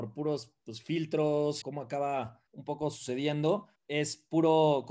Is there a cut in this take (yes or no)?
yes